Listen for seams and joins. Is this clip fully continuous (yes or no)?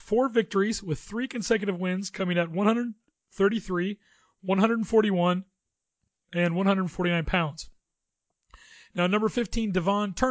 yes